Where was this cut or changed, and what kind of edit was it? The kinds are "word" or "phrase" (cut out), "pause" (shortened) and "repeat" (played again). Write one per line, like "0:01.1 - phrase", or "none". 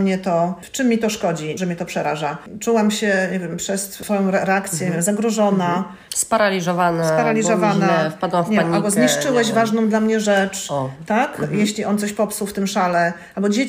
0:01.6 - phrase